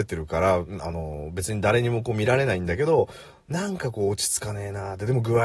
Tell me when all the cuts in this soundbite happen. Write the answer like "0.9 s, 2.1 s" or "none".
none